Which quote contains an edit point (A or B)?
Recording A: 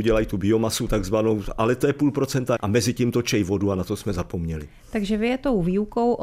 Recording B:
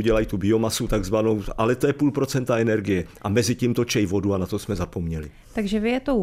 A